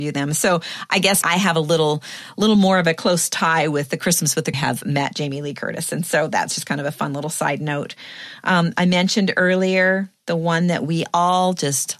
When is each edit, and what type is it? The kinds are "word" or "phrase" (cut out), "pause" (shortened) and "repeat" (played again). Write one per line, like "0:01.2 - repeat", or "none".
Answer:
0:01.2 - word
0:04.5 - phrase